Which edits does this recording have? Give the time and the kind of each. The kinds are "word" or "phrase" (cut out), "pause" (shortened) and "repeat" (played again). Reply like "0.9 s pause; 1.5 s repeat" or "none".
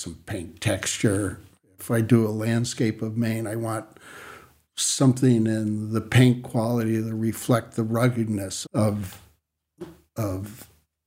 8.6 s word